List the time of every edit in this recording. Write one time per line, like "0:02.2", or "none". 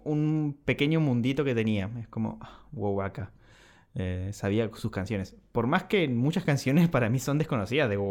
none